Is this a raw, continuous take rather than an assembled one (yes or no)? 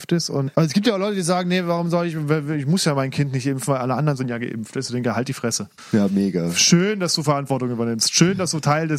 yes